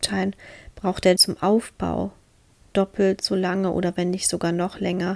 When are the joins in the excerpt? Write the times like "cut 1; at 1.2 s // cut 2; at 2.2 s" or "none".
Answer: cut 1; at 1.2 s